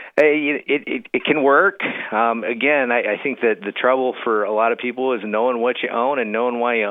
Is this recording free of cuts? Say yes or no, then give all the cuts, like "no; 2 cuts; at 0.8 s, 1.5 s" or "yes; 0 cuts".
yes; 0 cuts